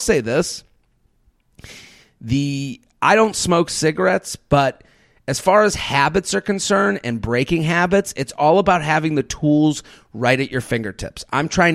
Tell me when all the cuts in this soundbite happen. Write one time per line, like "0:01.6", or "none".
none